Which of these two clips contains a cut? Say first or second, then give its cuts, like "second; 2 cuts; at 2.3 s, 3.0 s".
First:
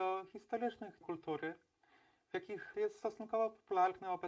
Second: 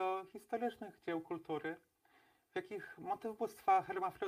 first; 2 cuts; at 1.0 s, 2.7 s